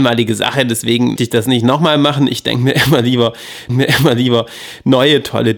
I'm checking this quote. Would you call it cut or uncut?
cut